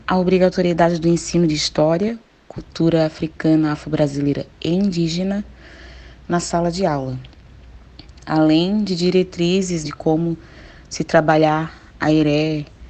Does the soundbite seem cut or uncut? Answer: cut